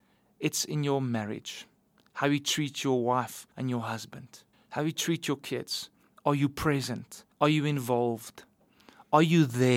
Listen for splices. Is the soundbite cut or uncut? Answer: cut